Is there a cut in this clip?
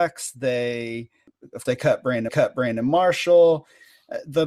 yes; 2 cuts; at 1.6 s, 2.3 s

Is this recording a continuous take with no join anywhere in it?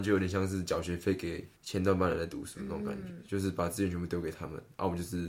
no; 1 cut; at 1.6 s

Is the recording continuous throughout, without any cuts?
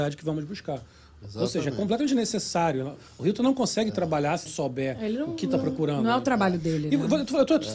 no; 1 cut; at 4.5 s

